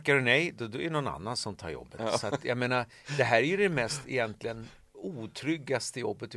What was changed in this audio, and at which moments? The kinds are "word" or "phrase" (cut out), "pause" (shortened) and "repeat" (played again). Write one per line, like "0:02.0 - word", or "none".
0:04.9 - pause